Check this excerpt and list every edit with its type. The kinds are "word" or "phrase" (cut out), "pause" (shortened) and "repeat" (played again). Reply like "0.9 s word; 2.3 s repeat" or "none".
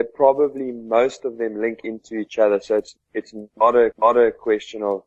3.0 s word; 3.9 s repeat